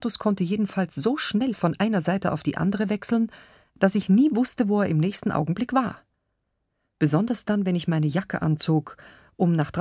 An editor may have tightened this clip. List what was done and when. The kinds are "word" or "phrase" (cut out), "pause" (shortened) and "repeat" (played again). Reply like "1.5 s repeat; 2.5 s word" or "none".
none